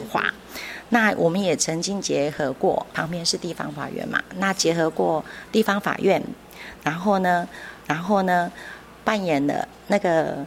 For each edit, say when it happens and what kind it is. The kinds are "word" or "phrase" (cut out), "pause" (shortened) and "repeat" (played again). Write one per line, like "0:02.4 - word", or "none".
0:02.9 - pause
0:07.8 - repeat